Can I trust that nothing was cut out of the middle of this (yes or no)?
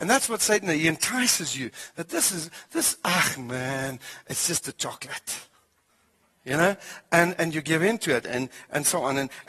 yes